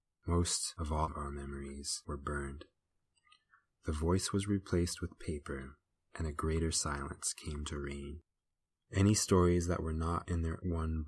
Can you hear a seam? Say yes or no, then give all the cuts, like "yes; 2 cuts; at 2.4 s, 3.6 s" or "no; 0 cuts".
no; 0 cuts